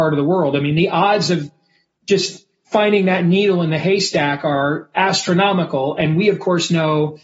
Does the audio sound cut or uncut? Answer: uncut